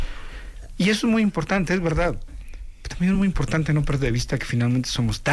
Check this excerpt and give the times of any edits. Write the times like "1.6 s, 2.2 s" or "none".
none